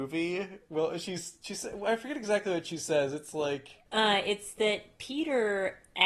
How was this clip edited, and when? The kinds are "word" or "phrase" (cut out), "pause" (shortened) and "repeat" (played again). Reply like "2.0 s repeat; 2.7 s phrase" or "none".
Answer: 3.9 s pause

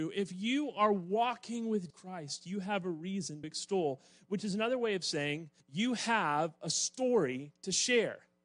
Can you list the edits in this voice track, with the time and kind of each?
1.9 s word; 3.4 s word; 5.6 s pause

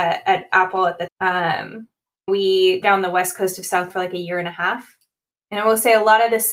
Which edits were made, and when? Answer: 1.1 s word; 2.3 s word; 2.8 s word; 3.9 s word

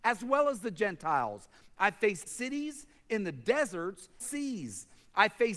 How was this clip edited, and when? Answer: 2.3 s phrase; 4.2 s phrase

